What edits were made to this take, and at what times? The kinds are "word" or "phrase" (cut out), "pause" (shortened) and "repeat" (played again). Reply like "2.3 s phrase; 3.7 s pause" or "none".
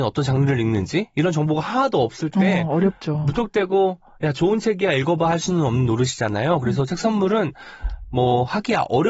none